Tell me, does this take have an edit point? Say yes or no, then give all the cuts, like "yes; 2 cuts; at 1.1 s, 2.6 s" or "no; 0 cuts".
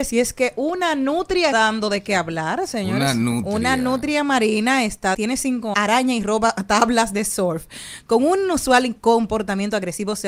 yes; 3 cuts; at 1.5 s, 5.1 s, 5.7 s